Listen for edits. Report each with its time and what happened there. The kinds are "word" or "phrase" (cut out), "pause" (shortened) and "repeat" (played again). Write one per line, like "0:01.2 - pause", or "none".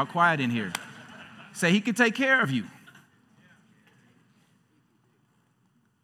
none